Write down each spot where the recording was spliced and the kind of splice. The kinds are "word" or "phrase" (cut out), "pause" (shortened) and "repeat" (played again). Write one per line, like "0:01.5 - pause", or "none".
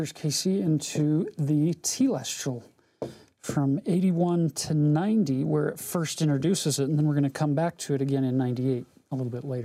none